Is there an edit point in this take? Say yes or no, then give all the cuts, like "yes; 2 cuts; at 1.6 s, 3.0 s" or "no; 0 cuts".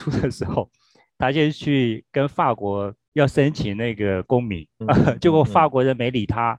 yes; 1 cut; at 4.8 s